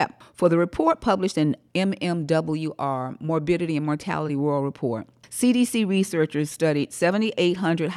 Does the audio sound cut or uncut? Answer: uncut